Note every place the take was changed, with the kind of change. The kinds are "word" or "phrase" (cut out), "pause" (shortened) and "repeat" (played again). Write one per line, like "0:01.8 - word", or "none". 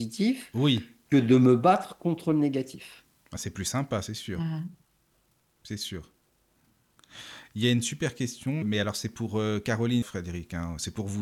0:08.6 - word
0:10.0 - phrase